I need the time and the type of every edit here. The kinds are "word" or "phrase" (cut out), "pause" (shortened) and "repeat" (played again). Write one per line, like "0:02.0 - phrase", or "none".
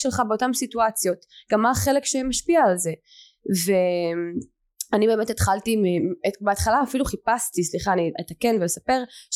none